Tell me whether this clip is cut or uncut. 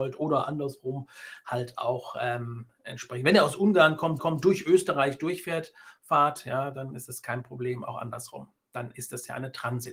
cut